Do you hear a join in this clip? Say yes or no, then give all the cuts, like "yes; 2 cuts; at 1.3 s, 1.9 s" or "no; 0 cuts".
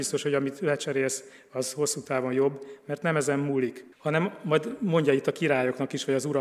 yes; 1 cut; at 3.9 s